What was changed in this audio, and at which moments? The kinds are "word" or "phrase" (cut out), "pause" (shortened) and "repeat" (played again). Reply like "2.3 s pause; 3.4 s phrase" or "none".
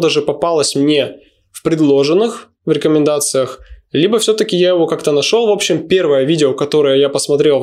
none